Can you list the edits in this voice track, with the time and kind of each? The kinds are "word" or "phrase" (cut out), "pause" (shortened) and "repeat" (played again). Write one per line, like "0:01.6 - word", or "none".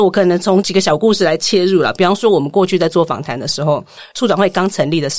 none

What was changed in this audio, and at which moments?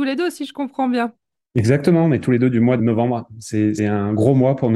0:02.8 - word
0:03.8 - word

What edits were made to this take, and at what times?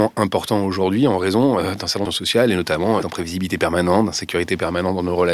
0:02.1 - word
0:03.0 - word

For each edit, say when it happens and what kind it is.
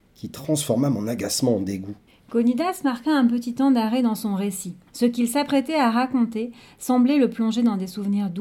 0:02.1 - pause
0:04.9 - pause

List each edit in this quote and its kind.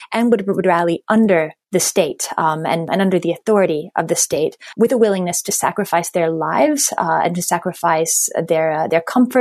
none

